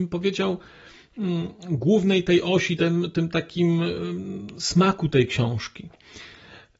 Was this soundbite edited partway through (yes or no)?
no